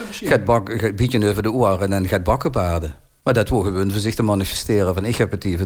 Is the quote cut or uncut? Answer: uncut